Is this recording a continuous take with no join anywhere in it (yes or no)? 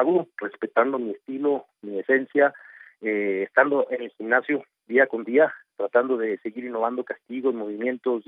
yes